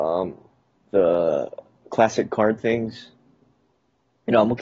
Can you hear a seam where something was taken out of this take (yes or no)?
no